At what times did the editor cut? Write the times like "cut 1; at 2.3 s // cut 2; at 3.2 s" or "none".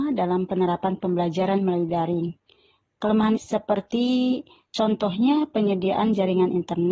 cut 1; at 3.4 s